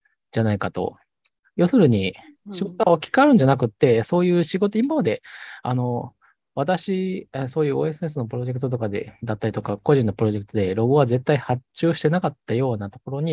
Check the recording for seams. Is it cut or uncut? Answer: uncut